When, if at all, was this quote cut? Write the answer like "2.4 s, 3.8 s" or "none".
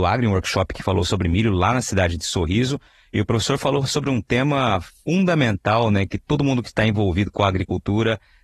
none